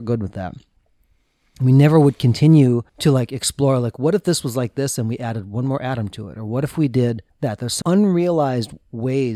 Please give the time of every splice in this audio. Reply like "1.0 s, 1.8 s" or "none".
2.9 s, 7.3 s, 7.8 s